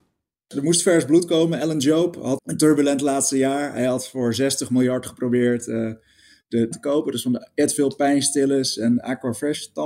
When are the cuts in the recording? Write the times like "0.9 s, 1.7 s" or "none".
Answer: 2.4 s, 6.7 s

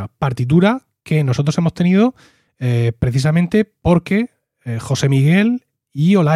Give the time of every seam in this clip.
none

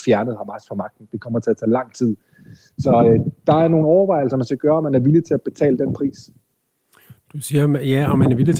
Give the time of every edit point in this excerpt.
none

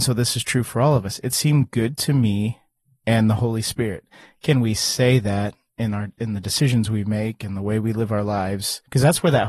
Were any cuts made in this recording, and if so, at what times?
none

